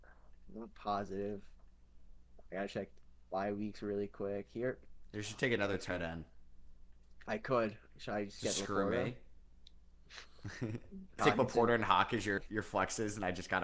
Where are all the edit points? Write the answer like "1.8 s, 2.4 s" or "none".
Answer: 11.2 s, 12.4 s

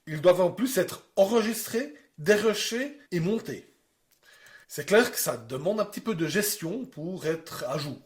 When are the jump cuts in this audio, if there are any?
3.0 s, 4.6 s

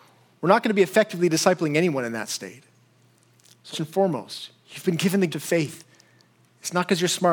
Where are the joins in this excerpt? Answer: 3.7 s, 5.3 s

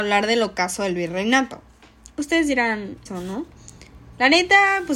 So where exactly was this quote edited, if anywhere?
3.1 s

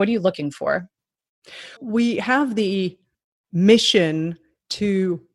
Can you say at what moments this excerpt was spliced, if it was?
1.8 s

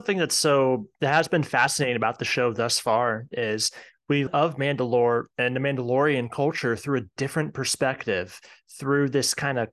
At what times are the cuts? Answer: 0.9 s, 4.3 s, 5.3 s

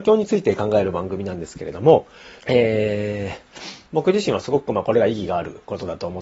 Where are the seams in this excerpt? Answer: 2.4 s, 3.9 s

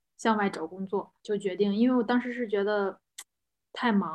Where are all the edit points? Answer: 1.2 s

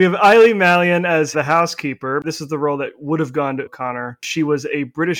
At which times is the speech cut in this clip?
1.3 s, 3.7 s

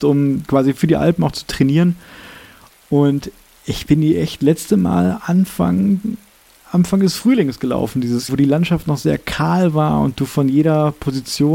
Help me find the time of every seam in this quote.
8.3 s

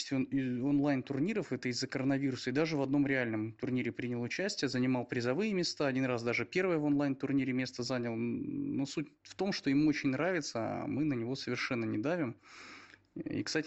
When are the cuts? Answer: none

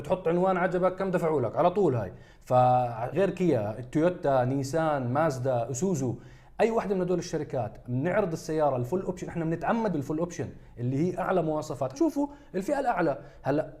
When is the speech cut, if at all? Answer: 3.1 s, 7.8 s, 9.9 s, 11.9 s

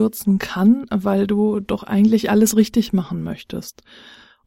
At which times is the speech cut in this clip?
none

